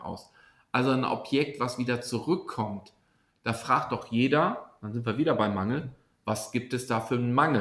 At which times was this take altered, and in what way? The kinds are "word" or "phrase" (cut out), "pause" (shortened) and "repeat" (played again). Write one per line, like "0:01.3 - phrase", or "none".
none